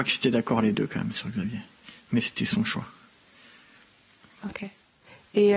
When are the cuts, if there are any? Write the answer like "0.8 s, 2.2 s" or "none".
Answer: none